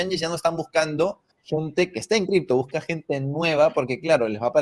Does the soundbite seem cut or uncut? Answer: cut